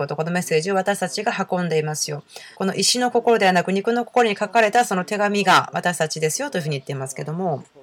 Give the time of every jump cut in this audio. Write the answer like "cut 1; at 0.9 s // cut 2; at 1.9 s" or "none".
cut 1; at 2.5 s